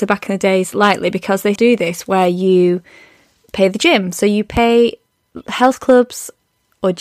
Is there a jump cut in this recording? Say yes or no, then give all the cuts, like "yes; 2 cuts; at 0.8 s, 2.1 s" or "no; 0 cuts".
yes; 1 cut; at 1.6 s